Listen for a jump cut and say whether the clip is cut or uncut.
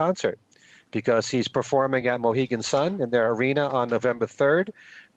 uncut